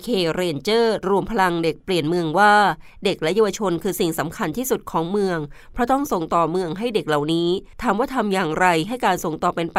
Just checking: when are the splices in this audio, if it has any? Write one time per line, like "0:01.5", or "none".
0:07.7